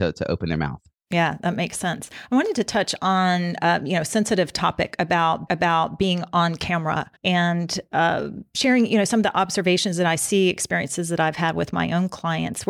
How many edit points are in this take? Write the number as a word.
two